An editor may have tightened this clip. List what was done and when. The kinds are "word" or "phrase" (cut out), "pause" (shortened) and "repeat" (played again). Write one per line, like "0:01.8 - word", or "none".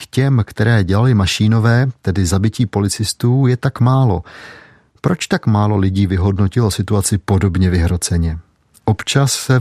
none